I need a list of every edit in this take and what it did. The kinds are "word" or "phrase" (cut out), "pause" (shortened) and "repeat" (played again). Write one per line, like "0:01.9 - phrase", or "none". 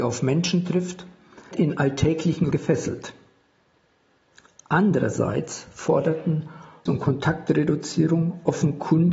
0:01.5 - word
0:02.5 - word
0:06.9 - word